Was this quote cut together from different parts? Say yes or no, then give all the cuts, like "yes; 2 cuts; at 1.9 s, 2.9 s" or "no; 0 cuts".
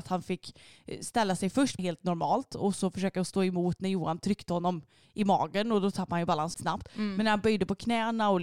yes; 2 cuts; at 1.8 s, 6.5 s